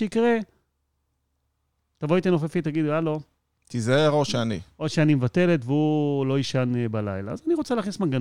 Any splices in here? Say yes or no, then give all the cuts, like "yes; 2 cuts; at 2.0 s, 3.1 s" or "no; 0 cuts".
no; 0 cuts